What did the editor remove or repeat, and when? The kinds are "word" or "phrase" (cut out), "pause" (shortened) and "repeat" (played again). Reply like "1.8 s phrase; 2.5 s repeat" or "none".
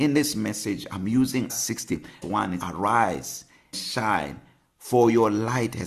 1.5 s word; 2.2 s word; 2.6 s word; 3.7 s word